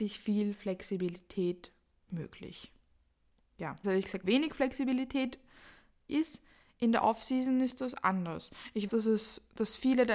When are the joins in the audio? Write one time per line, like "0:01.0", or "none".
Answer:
0:03.8
0:04.2
0:06.1
0:08.9